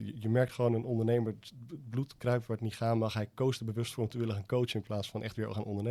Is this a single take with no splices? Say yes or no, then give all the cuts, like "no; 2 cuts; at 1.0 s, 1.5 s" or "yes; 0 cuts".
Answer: yes; 0 cuts